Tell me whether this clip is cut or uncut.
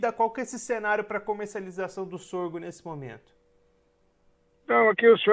uncut